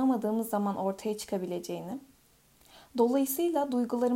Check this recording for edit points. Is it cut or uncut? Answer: uncut